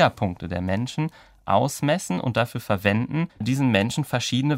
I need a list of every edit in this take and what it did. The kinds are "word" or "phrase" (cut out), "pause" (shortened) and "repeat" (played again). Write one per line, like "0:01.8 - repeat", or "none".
0:03.3 - pause